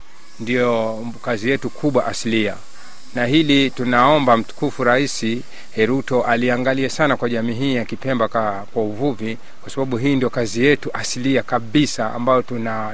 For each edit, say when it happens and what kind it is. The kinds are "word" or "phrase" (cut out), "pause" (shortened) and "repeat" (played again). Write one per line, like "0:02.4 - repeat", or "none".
none